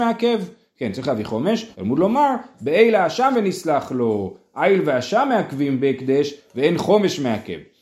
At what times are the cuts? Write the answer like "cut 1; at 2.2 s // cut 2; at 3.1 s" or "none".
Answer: cut 1; at 1.7 s